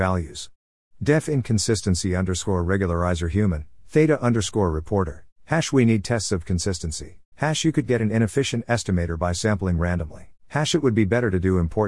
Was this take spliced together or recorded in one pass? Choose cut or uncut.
cut